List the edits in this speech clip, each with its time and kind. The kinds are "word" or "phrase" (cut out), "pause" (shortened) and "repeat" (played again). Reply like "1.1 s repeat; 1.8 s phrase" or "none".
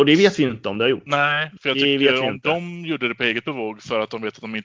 none